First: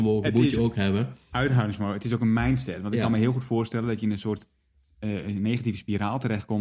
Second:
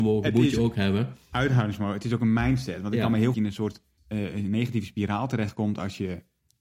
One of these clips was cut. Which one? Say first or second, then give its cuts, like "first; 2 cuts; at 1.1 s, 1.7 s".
second; 2 cuts; at 3.3 s, 4.0 s